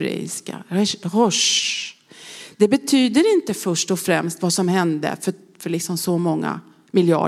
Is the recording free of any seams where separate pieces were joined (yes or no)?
yes